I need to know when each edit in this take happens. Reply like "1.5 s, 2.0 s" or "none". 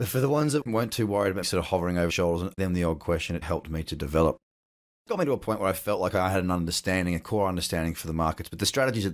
1.4 s, 2.1 s, 2.6 s, 3.4 s, 5.1 s